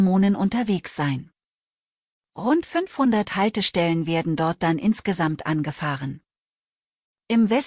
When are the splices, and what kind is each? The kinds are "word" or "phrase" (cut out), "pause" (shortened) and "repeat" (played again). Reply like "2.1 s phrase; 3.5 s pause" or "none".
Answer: none